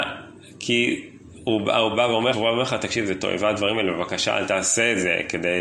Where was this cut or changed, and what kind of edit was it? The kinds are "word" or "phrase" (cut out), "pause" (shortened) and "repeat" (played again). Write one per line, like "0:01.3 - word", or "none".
0:02.3 - word